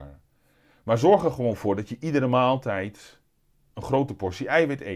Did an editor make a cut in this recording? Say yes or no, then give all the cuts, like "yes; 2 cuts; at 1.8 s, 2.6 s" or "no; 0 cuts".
no; 0 cuts